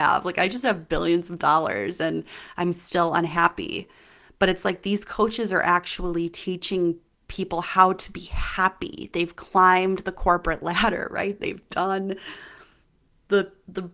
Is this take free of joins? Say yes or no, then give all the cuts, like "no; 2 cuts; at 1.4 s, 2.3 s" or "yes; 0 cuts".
yes; 0 cuts